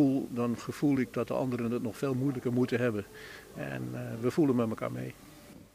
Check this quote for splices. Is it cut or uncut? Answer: uncut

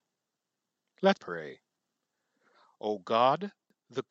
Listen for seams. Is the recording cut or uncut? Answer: cut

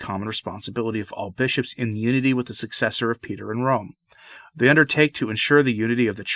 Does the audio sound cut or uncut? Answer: uncut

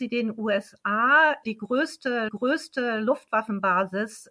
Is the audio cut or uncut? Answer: cut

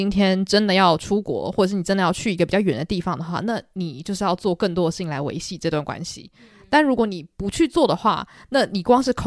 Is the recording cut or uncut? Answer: uncut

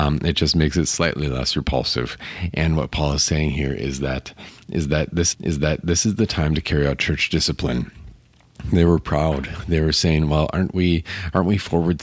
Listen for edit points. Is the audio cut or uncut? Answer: cut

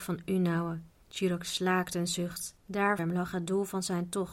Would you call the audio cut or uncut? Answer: cut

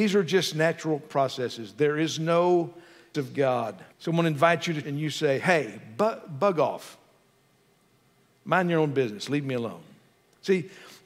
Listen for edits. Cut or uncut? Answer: cut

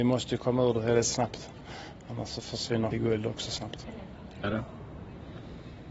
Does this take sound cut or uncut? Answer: cut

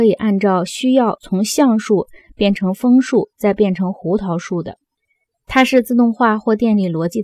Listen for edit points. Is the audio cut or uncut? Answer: uncut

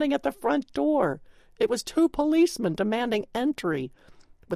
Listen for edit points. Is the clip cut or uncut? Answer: uncut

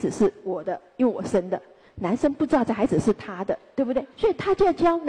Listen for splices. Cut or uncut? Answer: cut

